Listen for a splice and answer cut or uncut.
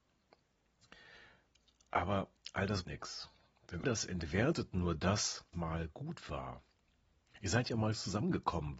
cut